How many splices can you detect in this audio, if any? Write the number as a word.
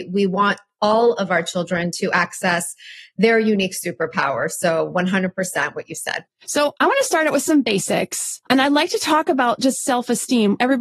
two